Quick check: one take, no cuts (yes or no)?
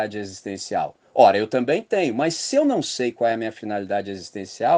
yes